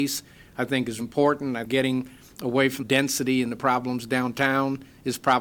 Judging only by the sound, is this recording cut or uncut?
cut